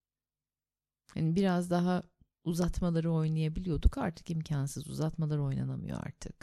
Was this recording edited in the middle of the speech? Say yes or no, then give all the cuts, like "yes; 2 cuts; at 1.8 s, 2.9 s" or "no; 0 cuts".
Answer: no; 0 cuts